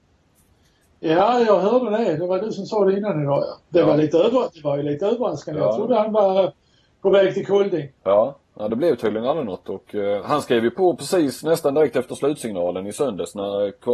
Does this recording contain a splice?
no; 0 cuts

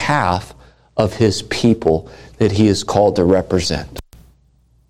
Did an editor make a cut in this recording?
no; 0 cuts

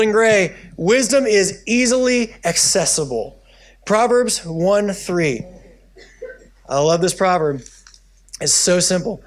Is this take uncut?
yes; 0 cuts

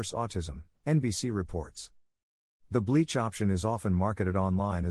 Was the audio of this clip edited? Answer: no; 0 cuts

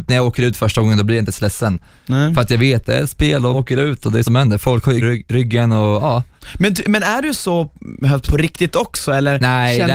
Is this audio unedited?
no; 4 cuts; at 3.5 s, 4.2 s, 5.0 s, 8.2 s

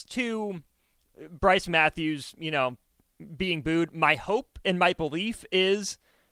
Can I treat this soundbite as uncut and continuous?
yes; 0 cuts

